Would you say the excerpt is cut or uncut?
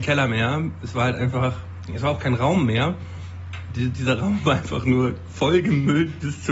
uncut